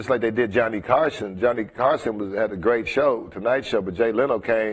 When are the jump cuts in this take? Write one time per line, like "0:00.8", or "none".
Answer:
none